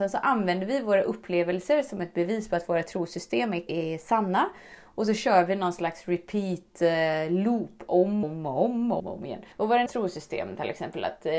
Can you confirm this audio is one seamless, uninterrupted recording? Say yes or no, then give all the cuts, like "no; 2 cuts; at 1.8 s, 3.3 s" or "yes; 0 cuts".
no; 5 cuts; at 3.7 s, 8.2 s, 9.0 s, 9.5 s, 9.9 s